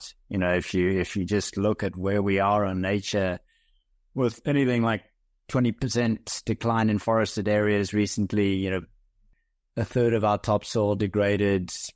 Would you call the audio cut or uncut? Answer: uncut